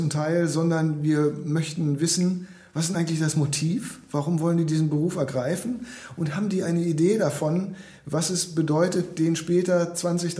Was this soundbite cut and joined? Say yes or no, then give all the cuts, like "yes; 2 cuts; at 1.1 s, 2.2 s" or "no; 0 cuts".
no; 0 cuts